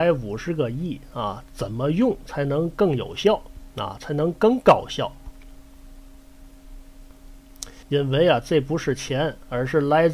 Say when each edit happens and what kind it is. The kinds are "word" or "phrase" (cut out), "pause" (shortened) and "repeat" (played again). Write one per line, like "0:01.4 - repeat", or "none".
0:07.8 - pause